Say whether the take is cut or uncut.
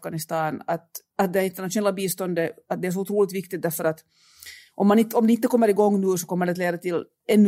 uncut